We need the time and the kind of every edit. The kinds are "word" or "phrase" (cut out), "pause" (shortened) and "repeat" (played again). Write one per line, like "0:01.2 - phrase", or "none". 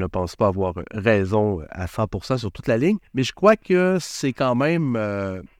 0:03.1 - pause